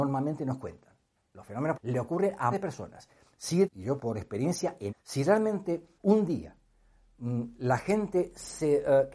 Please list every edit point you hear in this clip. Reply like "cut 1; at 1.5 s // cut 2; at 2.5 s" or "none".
cut 1; at 1.7 s // cut 2; at 2.5 s // cut 3; at 3.6 s // cut 4; at 4.0 s // cut 5; at 4.9 s // cut 6; at 6.0 s